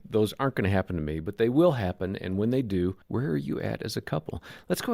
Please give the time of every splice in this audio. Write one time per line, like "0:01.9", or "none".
0:03.0